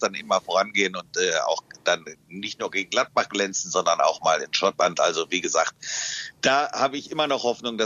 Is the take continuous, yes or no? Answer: yes